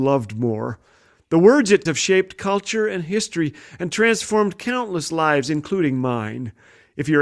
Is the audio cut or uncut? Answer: cut